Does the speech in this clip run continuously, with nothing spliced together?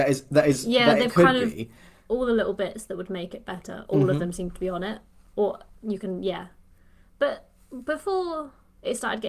yes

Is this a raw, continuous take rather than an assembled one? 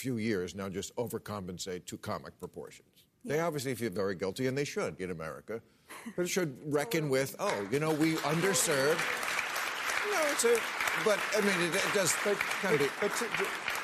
no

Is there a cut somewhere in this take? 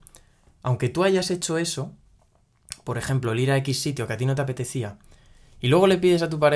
no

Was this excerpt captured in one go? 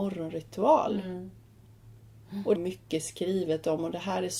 no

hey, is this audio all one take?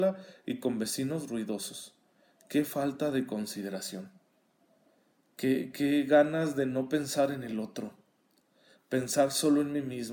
yes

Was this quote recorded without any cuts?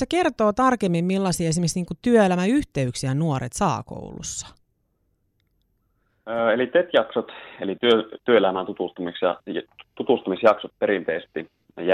yes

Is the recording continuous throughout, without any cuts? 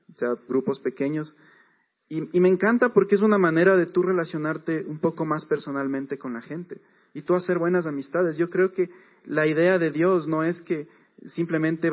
yes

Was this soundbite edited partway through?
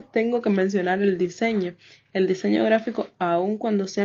no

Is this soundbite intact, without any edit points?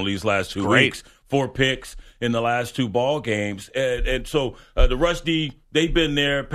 yes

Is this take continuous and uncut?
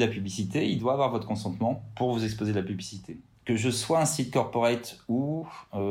yes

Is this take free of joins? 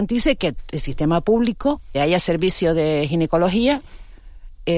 no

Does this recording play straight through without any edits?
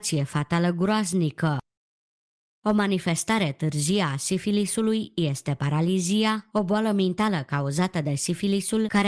yes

